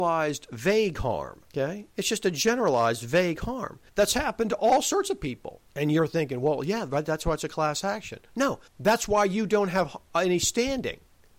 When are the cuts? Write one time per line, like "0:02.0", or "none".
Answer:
0:01.5
0:03.9
0:05.7
0:08.7